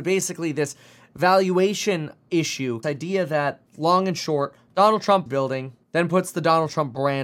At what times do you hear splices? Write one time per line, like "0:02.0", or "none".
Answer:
0:02.8
0:03.7
0:05.3
0:05.8